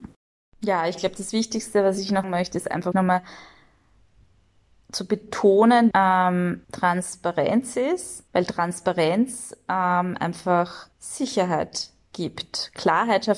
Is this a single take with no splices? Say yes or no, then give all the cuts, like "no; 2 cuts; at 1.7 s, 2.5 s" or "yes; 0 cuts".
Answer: no; 6 cuts; at 2.2 s, 2.9 s, 5.9 s, 6.6 s, 8.3 s, 10.9 s